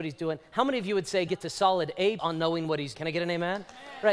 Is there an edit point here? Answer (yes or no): yes